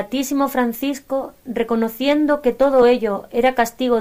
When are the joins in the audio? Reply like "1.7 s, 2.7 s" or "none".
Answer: none